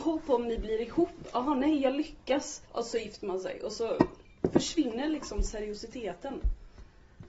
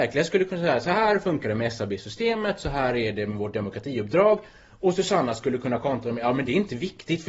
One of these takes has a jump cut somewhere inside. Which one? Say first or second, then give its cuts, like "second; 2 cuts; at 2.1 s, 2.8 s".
first; 1 cut; at 2.7 s